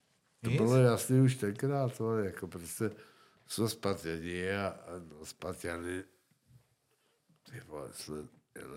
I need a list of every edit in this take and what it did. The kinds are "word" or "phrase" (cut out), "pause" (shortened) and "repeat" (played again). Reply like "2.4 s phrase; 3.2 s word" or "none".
none